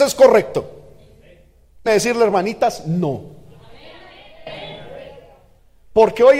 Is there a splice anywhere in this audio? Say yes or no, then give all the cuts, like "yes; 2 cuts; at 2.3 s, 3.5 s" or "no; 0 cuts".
yes; 1 cut; at 1.9 s